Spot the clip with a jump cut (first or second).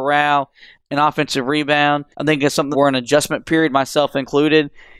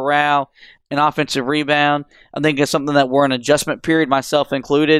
first